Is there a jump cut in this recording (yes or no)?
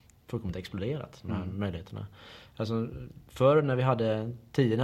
no